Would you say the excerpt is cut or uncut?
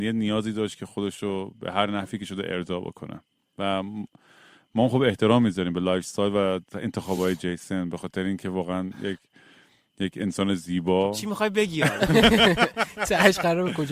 uncut